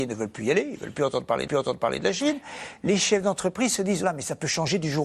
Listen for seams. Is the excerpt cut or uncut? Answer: cut